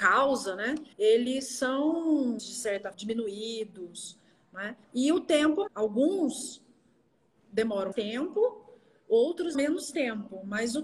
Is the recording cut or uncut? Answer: cut